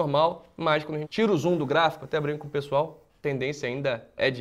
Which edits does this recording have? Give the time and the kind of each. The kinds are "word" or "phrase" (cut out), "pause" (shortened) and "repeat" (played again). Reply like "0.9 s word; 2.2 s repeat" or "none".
1.0 s word